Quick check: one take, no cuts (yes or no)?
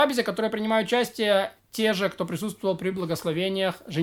yes